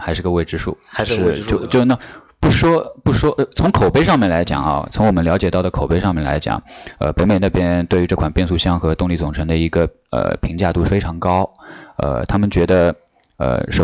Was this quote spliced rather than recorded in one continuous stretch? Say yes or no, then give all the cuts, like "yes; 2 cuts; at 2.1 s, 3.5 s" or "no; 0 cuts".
no; 0 cuts